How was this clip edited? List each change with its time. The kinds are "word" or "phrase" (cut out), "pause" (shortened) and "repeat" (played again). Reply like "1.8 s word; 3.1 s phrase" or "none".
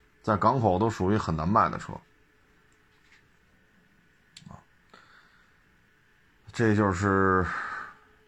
none

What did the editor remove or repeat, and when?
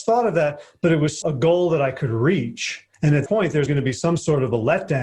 1.2 s word; 2.9 s pause; 3.3 s word; 3.7 s word

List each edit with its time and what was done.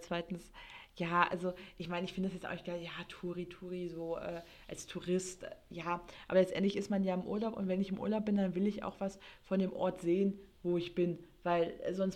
none

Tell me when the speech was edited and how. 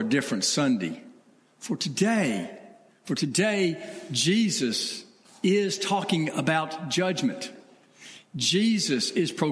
none

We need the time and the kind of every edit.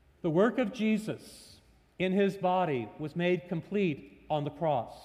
none

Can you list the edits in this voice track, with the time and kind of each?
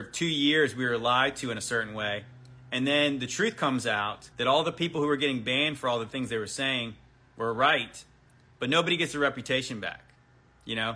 4.3 s pause

